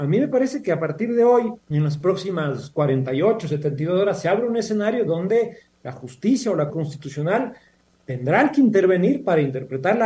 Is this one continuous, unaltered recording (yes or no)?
no